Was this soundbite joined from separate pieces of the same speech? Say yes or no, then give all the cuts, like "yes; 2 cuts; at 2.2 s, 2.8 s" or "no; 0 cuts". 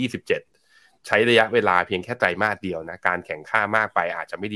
no; 0 cuts